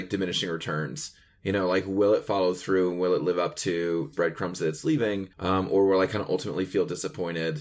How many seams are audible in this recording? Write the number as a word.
two